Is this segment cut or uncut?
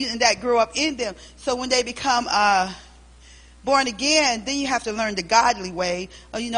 uncut